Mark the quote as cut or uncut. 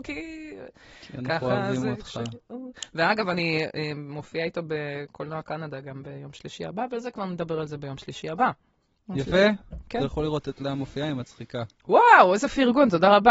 uncut